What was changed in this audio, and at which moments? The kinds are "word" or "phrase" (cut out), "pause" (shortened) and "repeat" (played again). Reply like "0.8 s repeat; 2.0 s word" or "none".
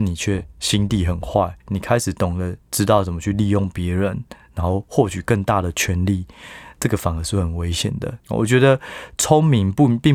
1.6 s pause; 2.6 s pause; 8.2 s pause